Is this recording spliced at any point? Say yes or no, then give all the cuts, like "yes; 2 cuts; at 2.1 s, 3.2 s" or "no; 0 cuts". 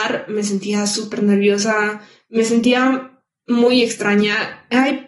no; 0 cuts